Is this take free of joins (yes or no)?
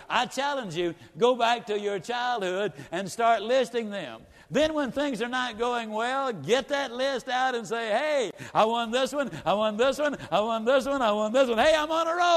yes